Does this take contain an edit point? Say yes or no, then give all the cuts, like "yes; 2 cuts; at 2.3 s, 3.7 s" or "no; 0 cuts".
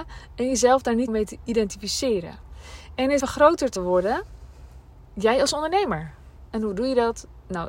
yes; 3 cuts; at 1.1 s, 3.2 s, 3.8 s